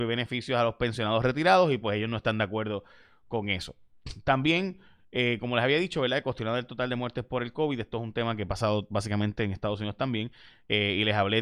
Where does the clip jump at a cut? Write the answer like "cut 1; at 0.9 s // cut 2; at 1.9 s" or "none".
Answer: none